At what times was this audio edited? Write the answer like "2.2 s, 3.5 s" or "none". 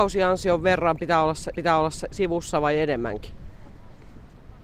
1.5 s